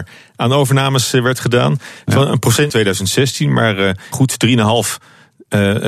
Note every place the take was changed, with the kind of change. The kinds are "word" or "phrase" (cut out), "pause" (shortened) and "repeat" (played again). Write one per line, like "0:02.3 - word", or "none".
0:02.7 - phrase
0:04.1 - word